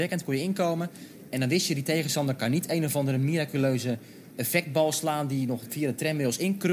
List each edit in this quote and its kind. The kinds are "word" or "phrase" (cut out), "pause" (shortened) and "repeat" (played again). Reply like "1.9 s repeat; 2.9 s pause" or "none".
none